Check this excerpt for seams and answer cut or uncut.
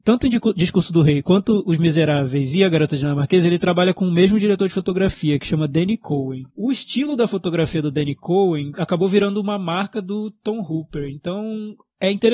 cut